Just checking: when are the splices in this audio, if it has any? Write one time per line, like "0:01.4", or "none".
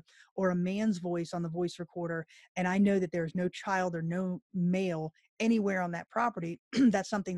none